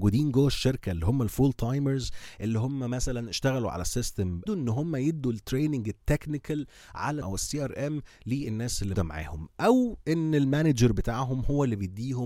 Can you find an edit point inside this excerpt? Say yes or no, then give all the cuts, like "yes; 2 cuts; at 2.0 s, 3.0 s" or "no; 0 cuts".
yes; 3 cuts; at 4.5 s, 7.2 s, 8.9 s